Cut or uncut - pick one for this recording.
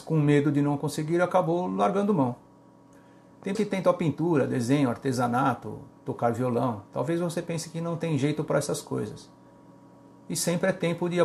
cut